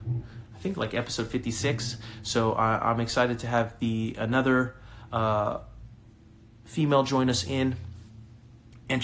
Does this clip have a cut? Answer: no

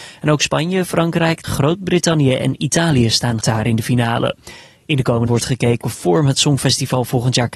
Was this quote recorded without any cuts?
no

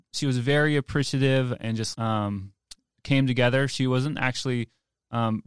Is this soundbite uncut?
no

